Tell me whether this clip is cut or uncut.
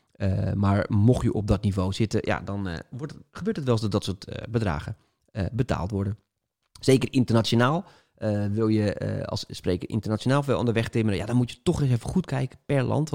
uncut